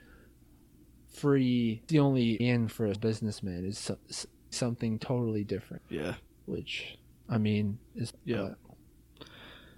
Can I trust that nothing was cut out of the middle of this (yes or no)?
no